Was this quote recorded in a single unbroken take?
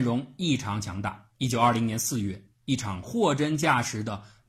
no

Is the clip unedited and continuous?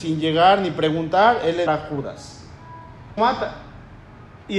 no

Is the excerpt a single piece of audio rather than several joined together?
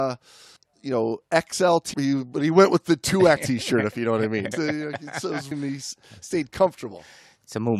no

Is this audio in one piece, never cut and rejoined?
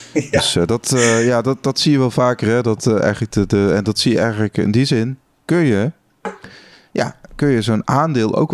yes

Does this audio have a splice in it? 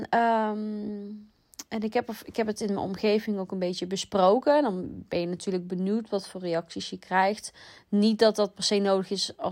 no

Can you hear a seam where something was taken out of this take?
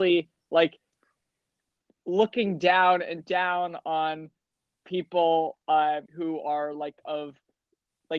yes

